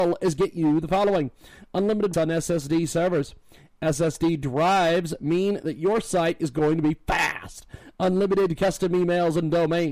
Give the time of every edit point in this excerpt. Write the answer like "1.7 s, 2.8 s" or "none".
2.1 s